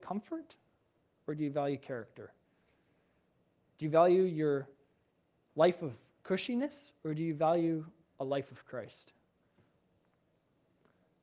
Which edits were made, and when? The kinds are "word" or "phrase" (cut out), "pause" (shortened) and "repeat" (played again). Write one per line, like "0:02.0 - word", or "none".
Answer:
none